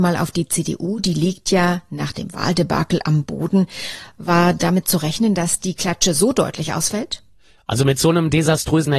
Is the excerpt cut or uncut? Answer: uncut